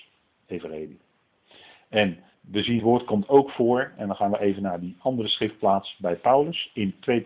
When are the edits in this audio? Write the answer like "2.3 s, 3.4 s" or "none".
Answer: 2.3 s, 2.8 s